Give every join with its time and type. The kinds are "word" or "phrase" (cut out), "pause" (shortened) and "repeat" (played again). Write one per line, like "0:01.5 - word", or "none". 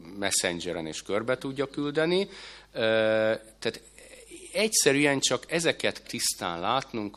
0:06.0 - word

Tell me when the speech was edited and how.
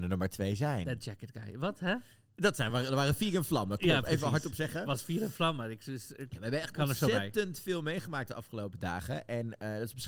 none

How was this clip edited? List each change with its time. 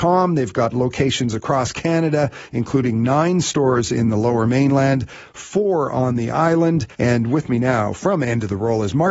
0:06.9 - pause

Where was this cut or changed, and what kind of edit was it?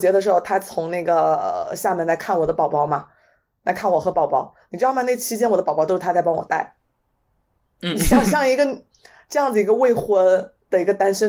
none

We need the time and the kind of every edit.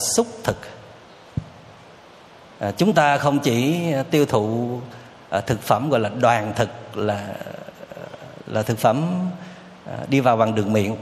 none

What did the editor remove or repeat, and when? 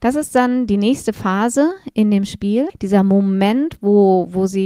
0:02.7 - word

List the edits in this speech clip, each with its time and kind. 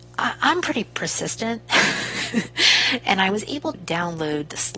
0:03.7 - word

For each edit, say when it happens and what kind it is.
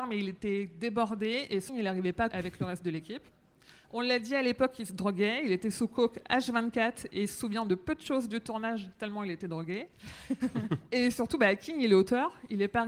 0:01.7 - phrase
0:02.3 - word

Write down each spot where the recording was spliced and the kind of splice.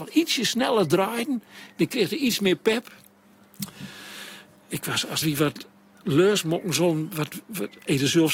0:05.2 - phrase

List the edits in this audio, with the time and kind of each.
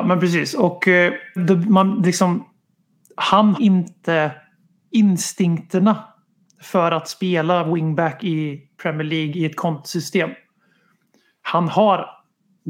0:01.4 - word
0:03.5 - word

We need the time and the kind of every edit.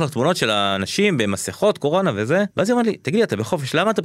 0:02.5 - pause

